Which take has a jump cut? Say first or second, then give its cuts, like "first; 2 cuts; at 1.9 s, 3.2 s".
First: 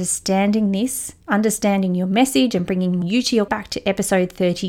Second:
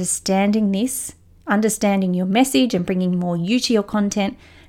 first; 3 cuts; at 1.2 s, 3.0 s, 3.5 s